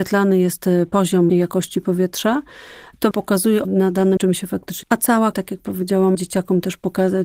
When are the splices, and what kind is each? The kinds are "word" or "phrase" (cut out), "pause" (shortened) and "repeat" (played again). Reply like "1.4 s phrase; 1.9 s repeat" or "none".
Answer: 1.3 s word; 3.1 s word; 3.6 s word; 4.2 s word; 4.8 s word; 5.3 s word; 6.1 s word